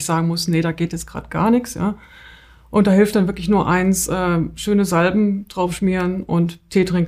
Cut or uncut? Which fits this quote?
uncut